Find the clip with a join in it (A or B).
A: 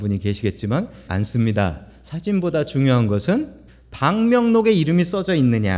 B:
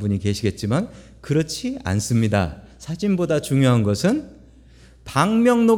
A